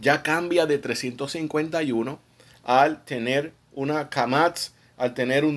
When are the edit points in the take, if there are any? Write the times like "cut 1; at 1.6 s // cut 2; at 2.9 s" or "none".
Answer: none